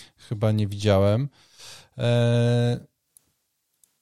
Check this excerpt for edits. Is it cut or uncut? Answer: uncut